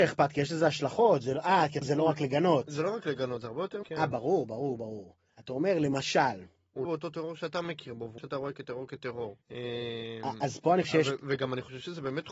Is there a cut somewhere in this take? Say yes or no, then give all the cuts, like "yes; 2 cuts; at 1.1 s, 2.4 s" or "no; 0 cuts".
yes; 7 cuts; at 1.8 s, 3.8 s, 5.3 s, 6.8 s, 8.2 s, 9.4 s, 10.8 s